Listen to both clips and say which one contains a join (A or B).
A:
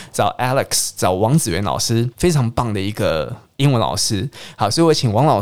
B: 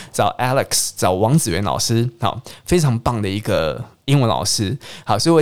A